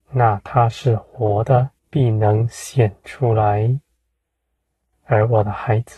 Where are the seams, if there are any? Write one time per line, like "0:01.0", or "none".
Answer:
0:01.8